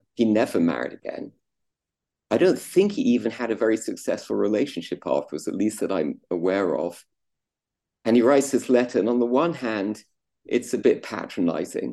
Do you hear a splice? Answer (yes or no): no